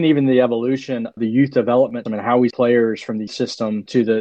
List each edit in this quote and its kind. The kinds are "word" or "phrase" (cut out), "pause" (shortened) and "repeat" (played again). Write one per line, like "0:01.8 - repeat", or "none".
0:01.1 - word
0:02.1 - word
0:02.5 - word
0:03.3 - word